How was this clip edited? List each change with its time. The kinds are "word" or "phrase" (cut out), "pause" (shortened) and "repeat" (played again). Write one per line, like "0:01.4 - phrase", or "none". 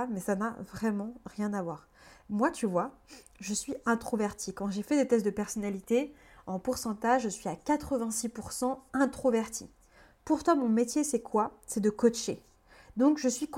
none